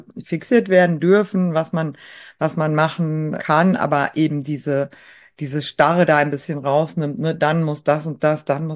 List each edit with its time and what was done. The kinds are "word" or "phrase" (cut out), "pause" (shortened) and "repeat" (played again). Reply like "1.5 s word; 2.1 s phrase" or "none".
3.4 s word